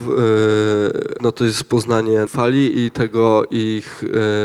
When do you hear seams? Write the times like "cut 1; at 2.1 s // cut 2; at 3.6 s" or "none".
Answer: cut 1; at 1.2 s // cut 2; at 2.3 s